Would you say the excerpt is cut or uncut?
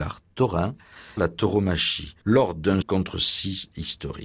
cut